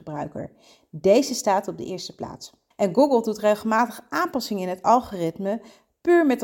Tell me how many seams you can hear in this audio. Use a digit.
1